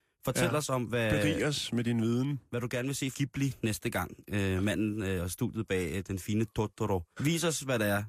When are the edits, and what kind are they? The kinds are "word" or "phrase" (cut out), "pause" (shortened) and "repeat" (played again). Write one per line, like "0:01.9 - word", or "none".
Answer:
0:03.1 - phrase
0:07.1 - pause